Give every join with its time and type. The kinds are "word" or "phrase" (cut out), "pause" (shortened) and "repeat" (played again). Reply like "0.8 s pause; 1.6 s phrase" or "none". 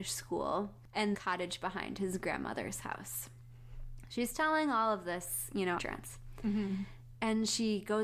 1.1 s phrase; 5.8 s phrase